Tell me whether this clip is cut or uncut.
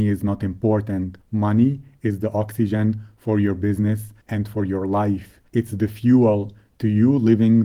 cut